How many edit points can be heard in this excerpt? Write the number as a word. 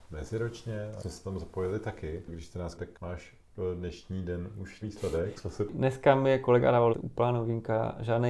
four